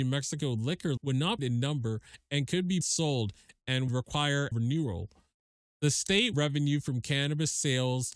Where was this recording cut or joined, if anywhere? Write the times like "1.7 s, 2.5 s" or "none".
1.0 s, 1.4 s, 2.8 s, 3.9 s, 4.5 s, 6.3 s